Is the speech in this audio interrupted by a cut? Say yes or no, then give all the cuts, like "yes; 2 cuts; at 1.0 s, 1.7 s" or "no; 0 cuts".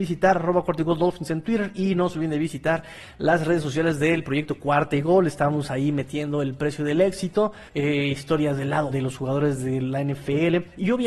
yes; 2 cuts; at 7.7 s, 8.9 s